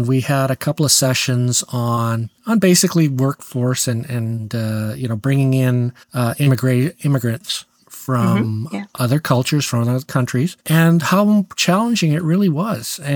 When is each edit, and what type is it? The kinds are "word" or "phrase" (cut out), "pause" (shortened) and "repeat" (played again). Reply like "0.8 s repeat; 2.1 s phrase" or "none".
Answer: 2.4 s pause; 6.0 s pause; 10.6 s pause